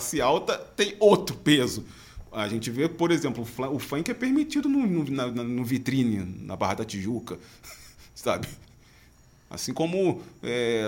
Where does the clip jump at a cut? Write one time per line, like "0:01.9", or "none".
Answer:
none